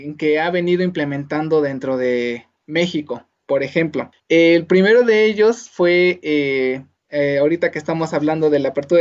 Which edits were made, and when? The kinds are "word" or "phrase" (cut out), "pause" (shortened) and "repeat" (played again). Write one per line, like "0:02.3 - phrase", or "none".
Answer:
0:04.2 - pause
0:07.0 - pause